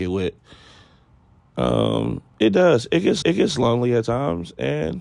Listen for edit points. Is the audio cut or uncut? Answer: cut